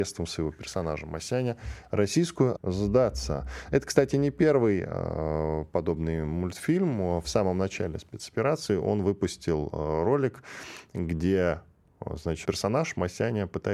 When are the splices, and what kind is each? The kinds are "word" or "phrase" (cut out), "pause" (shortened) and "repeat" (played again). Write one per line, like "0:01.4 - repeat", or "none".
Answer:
0:02.6 - word
0:12.4 - word